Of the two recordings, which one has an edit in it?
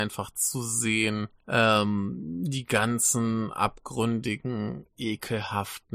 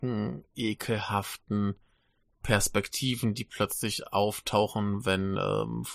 first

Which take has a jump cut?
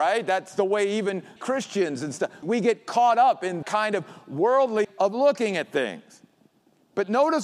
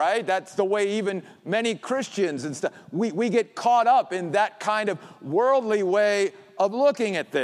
first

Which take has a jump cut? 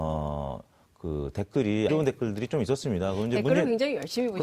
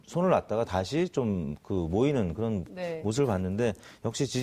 first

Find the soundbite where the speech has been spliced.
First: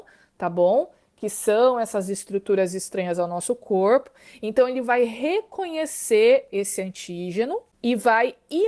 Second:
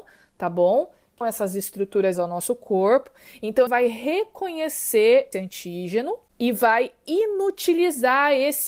second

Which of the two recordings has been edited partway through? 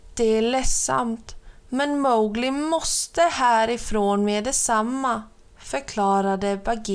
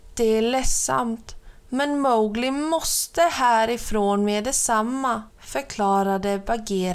second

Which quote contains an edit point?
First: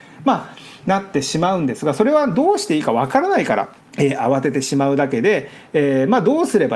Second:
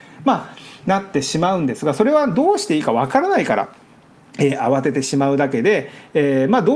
first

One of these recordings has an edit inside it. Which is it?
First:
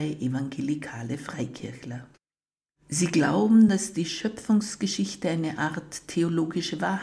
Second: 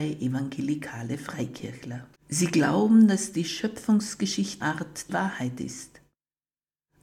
second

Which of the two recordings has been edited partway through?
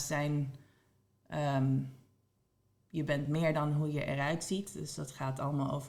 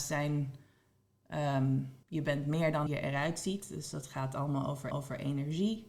second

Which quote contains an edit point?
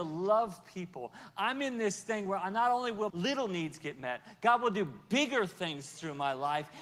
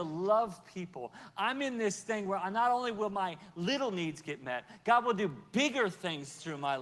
first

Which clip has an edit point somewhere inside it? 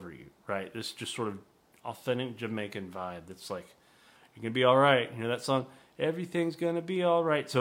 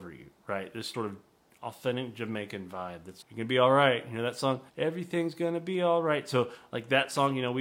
second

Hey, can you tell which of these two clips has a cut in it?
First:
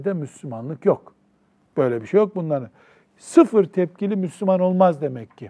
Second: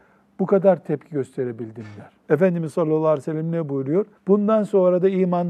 second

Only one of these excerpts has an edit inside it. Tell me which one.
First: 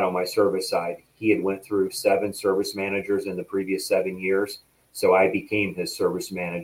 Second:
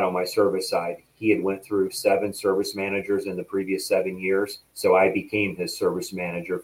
second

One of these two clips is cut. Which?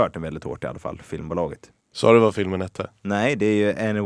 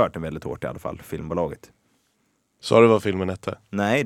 first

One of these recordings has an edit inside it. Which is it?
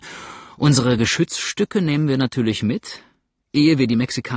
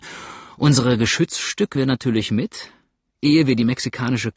second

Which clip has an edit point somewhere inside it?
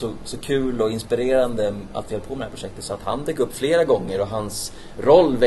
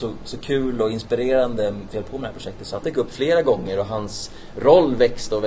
second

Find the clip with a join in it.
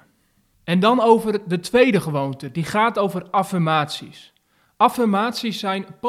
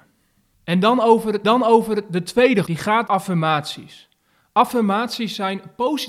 second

